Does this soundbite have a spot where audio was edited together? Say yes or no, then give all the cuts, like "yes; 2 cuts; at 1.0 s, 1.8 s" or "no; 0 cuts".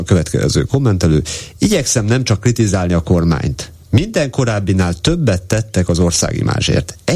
no; 0 cuts